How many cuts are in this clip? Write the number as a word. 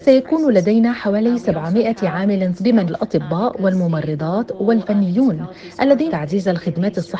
three